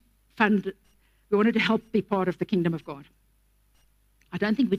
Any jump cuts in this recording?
no; 0 cuts

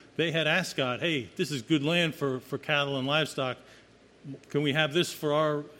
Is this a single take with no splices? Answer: no; 1 cut; at 4.4 s

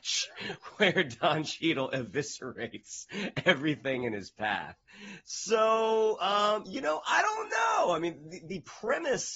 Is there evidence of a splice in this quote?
no; 0 cuts

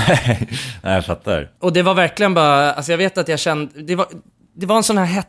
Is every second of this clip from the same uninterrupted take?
no; 1 cut; at 1.6 s

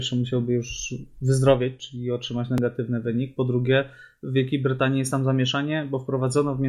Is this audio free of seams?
yes; 0 cuts

